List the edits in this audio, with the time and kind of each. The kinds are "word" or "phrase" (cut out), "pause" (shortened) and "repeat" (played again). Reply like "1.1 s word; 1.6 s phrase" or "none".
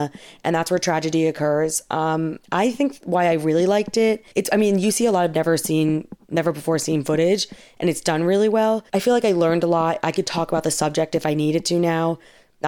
2.4 s pause; 4.3 s pause; 8.9 s pause